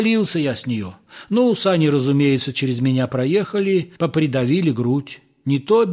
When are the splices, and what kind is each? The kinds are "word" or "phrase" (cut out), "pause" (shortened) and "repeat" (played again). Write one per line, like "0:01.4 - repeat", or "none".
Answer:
0:04.0 - pause